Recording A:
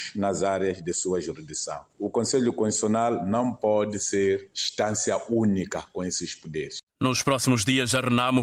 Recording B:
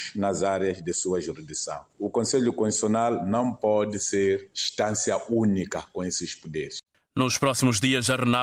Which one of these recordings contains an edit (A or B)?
A